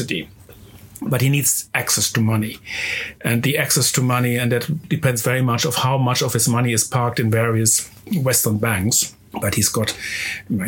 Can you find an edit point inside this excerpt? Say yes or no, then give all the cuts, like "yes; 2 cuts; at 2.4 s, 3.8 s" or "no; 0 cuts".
no; 0 cuts